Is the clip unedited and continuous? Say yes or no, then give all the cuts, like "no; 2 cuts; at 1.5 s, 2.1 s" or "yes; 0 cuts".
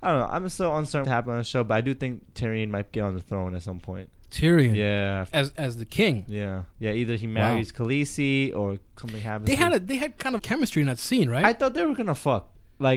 no; 6 cuts; at 1.0 s, 4.1 s, 5.3 s, 6.7 s, 8.9 s, 10.4 s